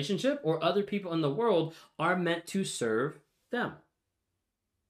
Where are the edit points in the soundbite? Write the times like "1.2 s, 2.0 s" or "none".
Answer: none